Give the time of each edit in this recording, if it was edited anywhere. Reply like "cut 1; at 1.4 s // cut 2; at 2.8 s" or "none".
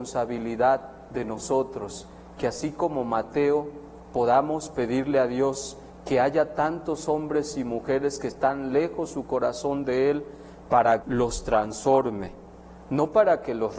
cut 1; at 11.0 s